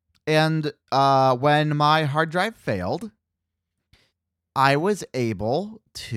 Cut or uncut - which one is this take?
uncut